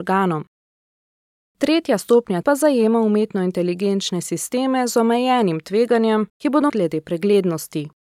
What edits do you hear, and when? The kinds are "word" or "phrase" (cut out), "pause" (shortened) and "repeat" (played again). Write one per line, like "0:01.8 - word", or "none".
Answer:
0:02.4 - word
0:06.3 - pause
0:06.7 - phrase